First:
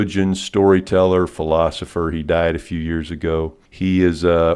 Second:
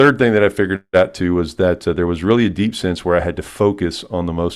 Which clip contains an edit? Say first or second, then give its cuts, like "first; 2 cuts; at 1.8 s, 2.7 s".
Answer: first; 1 cut; at 3.7 s